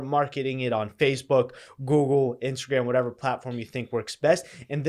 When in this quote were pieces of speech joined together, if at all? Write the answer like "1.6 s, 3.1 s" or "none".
none